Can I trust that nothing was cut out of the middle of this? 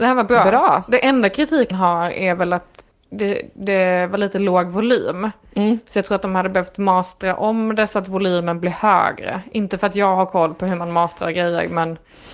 no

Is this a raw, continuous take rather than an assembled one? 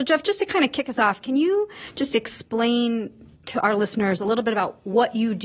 yes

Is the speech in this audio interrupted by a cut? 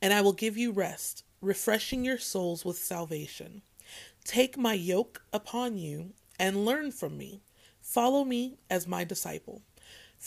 no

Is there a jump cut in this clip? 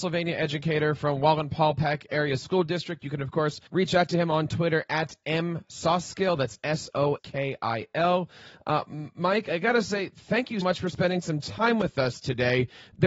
yes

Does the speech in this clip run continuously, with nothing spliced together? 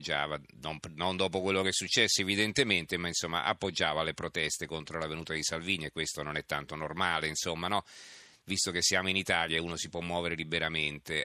yes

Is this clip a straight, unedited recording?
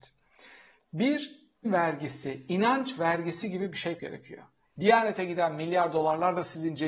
no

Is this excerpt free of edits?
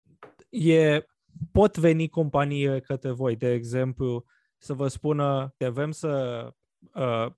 no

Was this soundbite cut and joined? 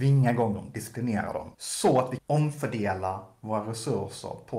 yes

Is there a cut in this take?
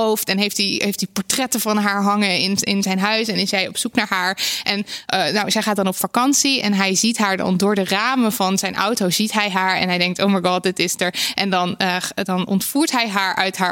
no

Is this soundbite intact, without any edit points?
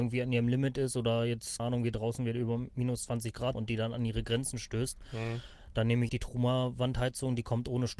no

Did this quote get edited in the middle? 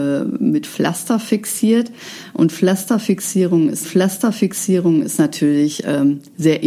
yes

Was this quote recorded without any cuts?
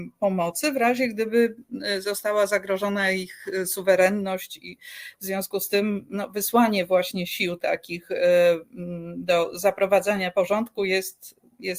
yes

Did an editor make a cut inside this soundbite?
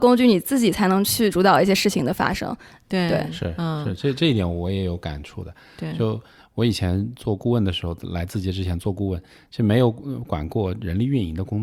no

